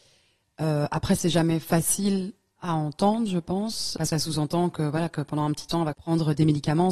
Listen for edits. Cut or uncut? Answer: cut